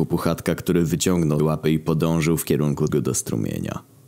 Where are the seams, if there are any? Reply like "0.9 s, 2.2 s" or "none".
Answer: 1.4 s, 2.9 s